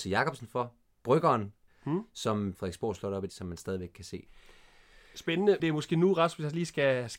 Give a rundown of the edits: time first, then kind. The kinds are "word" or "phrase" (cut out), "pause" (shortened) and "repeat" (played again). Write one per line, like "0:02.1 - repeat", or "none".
0:01.7 - word
0:02.5 - word
0:03.3 - word
0:05.6 - word

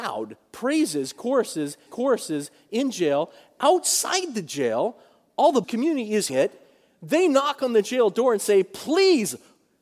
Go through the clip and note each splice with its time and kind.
0:01.9 - repeat
0:05.6 - word
0:06.3 - word

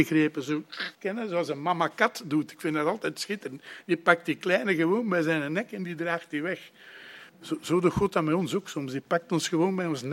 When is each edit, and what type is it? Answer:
0:00.9 - pause
0:07.3 - pause

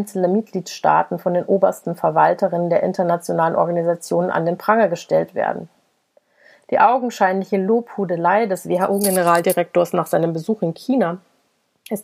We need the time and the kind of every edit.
none

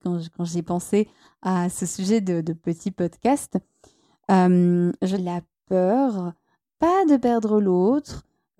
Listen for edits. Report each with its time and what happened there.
0:05.2 - phrase

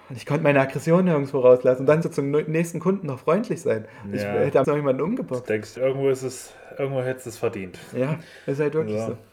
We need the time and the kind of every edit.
0:02.0 - word
0:04.6 - word
0:05.8 - word

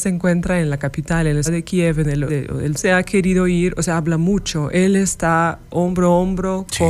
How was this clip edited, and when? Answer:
0:01.5 - word
0:02.3 - word
0:02.8 - phrase

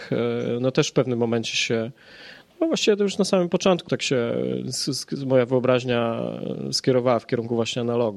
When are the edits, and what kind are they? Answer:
0:03.9 - word

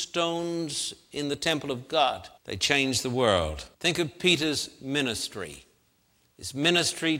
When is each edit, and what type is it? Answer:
0:02.4 - pause
0:03.7 - pause

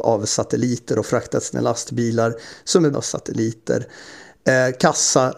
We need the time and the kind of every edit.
0:01.5 - word
0:02.9 - word

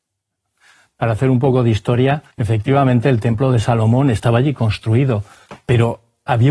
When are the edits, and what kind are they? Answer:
0:02.3 - pause

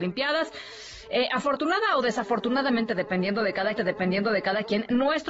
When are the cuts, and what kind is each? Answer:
0:03.8 - repeat

